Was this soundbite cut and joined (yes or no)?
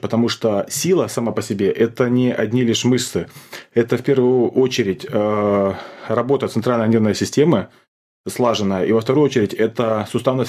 no